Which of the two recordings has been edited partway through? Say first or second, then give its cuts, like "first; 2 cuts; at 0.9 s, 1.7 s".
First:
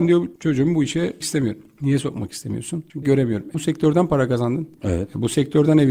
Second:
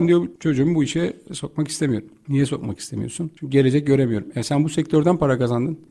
first; 3 cuts; at 1.2 s, 3.0 s, 3.5 s